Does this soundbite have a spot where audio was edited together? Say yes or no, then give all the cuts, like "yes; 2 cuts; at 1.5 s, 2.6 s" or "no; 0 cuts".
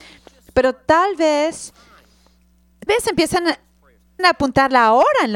yes; 2 cuts; at 2.9 s, 4.2 s